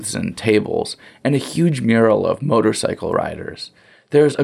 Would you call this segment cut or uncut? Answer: uncut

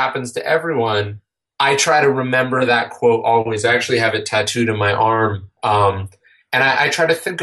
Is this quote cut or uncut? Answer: uncut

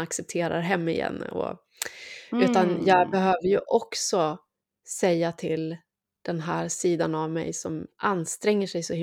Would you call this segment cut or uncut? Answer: uncut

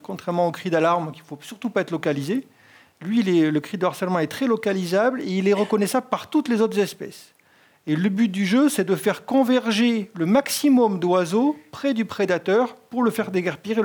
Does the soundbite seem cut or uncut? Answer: uncut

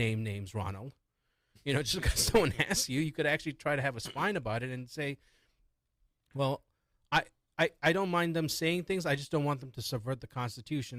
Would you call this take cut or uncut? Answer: uncut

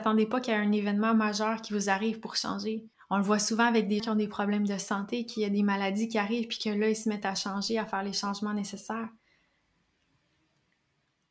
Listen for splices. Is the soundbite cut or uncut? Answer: cut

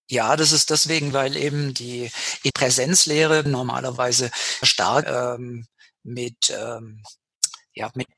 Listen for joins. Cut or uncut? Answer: cut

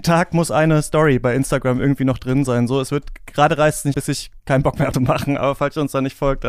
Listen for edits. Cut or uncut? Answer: cut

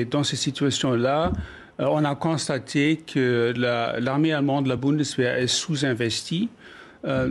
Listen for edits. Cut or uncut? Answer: uncut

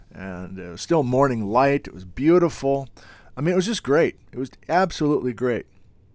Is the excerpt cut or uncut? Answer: uncut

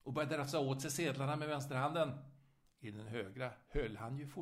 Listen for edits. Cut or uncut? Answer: uncut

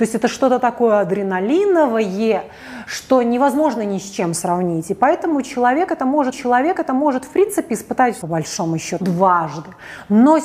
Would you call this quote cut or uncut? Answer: cut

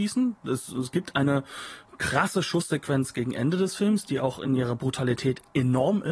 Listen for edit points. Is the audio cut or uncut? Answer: uncut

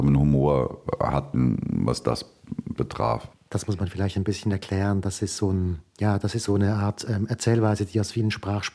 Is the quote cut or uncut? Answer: uncut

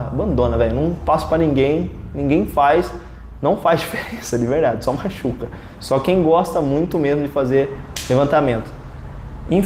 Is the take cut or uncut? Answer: uncut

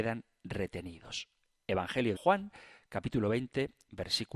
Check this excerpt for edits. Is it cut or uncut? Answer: cut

